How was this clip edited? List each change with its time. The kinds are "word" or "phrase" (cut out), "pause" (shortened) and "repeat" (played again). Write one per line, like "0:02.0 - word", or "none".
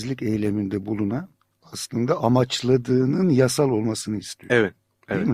none